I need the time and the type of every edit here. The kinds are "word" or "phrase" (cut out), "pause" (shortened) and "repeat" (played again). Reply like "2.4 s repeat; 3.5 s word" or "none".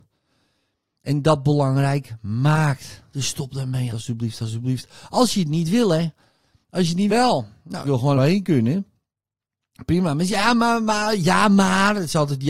3.9 s word; 7.1 s phrase; 7.8 s word; 8.2 s word

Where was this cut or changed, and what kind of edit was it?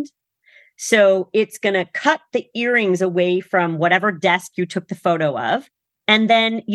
none

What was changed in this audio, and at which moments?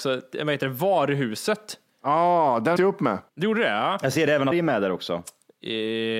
2.8 s word; 3.3 s pause; 4.5 s phrase

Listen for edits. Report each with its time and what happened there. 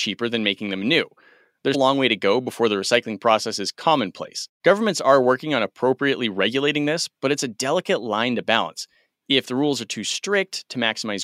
1.7 s word

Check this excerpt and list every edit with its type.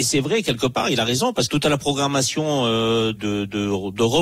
1.5 s word; 3.1 s word

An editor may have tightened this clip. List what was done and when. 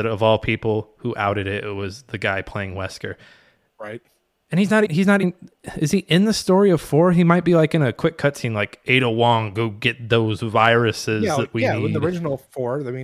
4.9 s word; 5.2 s word

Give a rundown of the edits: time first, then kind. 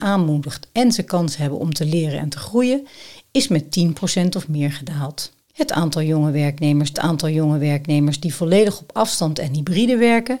5.5 s pause; 6.9 s repeat

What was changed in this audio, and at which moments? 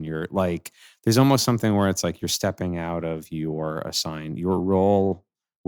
none

